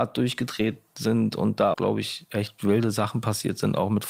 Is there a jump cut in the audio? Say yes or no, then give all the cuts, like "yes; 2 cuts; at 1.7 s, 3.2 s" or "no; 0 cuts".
yes; 1 cut; at 1.7 s